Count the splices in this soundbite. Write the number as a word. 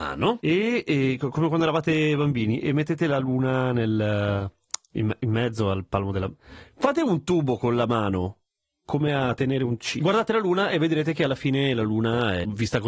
zero